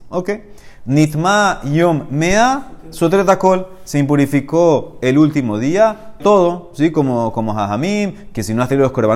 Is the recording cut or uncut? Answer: cut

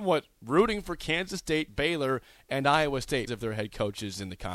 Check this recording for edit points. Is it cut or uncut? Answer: cut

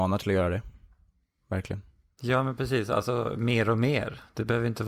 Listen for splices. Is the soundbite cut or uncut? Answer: uncut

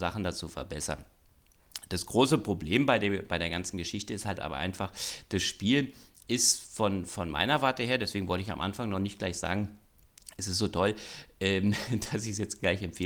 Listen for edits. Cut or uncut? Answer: uncut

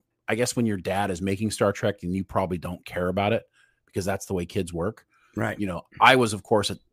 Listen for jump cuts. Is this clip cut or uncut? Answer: uncut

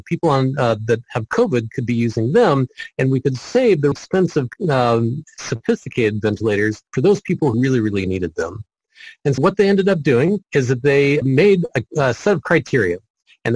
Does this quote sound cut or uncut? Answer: cut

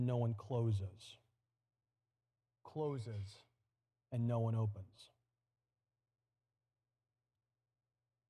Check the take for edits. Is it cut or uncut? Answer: uncut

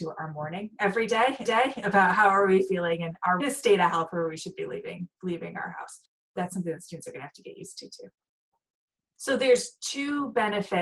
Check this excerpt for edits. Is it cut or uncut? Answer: cut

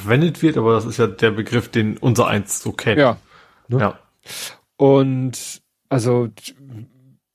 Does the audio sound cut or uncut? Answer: uncut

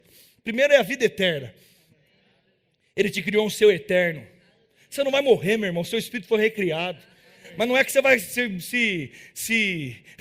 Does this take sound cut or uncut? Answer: uncut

